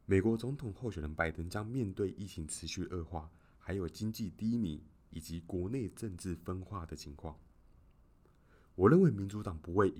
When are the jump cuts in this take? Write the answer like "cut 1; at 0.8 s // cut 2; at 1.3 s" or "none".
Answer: none